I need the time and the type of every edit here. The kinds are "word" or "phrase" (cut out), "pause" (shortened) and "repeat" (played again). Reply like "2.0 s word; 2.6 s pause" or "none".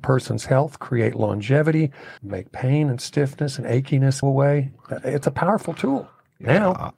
2.2 s pause; 4.2 s word; 5.2 s word

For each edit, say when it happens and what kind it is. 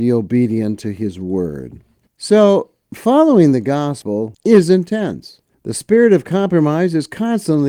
none

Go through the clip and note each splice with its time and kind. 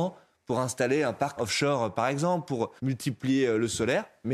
1.4 s word; 2.8 s pause

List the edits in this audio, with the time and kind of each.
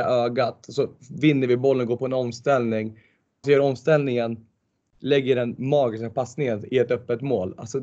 3.4 s word

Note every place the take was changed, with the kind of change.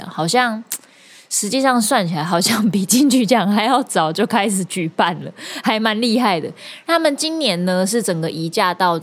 none

